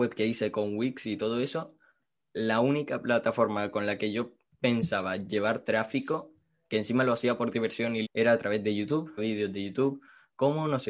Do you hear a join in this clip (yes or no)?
yes